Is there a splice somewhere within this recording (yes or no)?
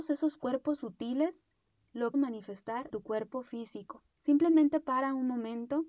yes